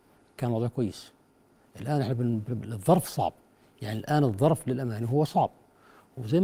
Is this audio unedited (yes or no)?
yes